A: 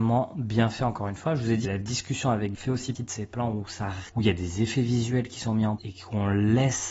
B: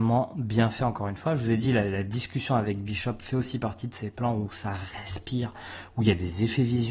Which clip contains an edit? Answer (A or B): A